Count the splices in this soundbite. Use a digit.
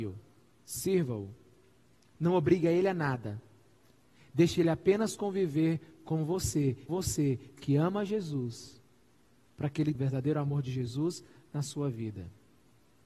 2